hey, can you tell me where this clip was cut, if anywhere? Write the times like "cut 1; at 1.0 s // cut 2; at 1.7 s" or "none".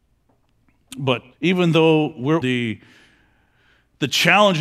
cut 1; at 1.3 s // cut 2; at 2.4 s

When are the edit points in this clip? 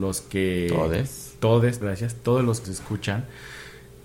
cut 1; at 1.8 s // cut 2; at 2.6 s

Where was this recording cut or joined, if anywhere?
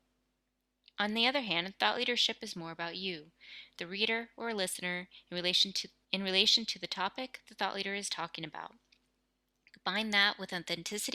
none

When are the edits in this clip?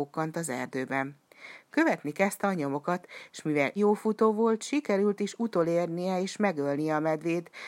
cut 1; at 3.8 s

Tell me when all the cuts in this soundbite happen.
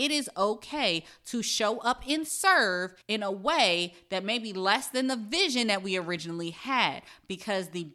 cut 1; at 3.0 s

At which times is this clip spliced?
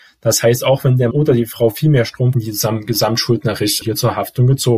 cut 1; at 1.1 s // cut 2; at 2.3 s // cut 3; at 3.8 s

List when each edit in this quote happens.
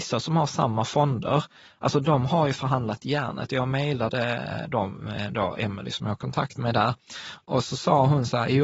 none

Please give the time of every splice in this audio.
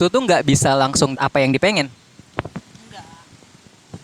cut 1; at 1.1 s

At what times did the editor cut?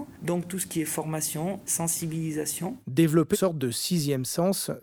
cut 1; at 1.7 s // cut 2; at 3.3 s

